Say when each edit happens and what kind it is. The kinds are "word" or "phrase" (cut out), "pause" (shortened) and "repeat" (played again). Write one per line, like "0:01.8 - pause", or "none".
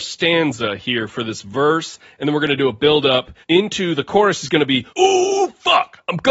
0:03.4 - pause
0:04.9 - pause